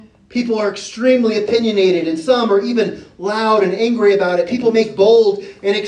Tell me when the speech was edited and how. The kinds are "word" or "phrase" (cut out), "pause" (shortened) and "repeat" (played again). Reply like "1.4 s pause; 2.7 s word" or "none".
none